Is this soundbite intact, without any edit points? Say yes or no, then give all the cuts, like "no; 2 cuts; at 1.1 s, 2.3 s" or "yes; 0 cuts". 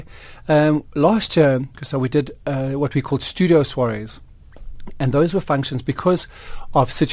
no; 1 cut; at 1.7 s